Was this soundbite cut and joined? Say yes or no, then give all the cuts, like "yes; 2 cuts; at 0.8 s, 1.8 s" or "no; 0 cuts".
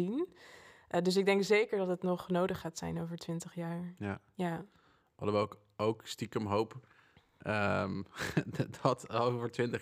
no; 0 cuts